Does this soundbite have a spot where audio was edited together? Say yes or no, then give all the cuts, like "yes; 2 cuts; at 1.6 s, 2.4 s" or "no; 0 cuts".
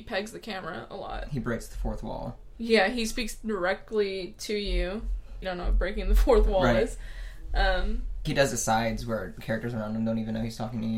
yes; 2 cuts; at 5.4 s, 8.3 s